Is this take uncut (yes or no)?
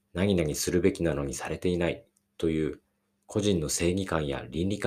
yes